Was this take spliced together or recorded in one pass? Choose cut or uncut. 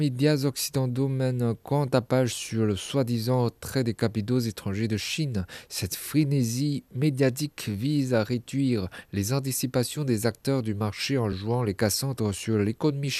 uncut